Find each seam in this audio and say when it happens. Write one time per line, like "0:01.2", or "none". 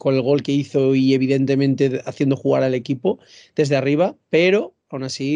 none